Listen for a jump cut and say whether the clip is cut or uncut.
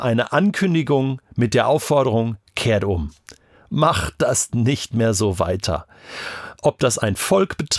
uncut